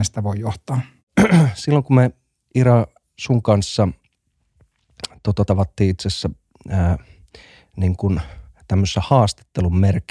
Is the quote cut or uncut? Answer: cut